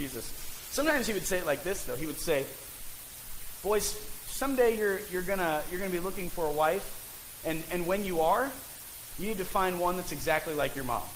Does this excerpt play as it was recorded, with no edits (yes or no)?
yes